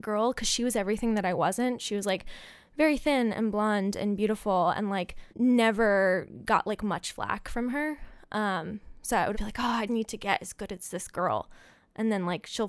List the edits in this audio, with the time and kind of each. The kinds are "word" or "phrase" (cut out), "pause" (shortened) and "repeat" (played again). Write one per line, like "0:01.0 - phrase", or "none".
0:05.3 - pause
0:09.3 - word
0:09.9 - word